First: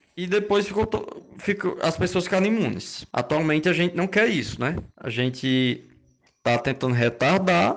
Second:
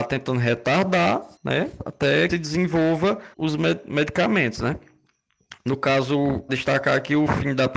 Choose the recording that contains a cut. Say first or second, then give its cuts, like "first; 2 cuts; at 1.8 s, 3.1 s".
second; 4 cuts; at 1.4 s, 2.3 s, 3.3 s, 6.5 s